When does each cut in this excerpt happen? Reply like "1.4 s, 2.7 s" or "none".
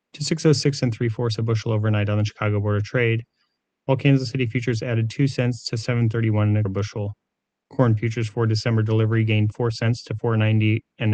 6.6 s